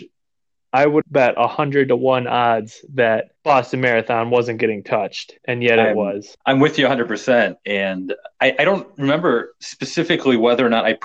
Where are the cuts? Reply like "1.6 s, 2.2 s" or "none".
1.0 s, 3.4 s, 5.4 s, 6.4 s, 8.3 s